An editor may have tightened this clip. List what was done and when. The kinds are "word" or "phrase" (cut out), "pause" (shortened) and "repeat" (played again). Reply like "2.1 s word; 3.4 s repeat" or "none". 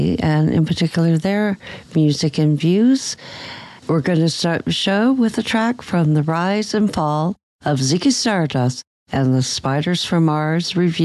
3.8 s pause